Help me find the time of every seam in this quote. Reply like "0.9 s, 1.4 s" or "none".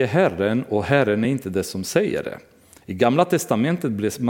none